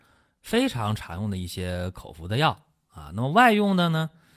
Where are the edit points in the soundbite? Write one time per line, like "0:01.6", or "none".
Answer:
none